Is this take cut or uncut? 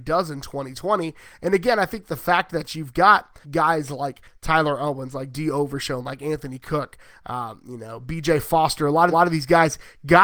cut